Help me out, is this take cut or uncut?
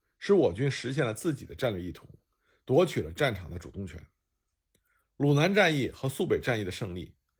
uncut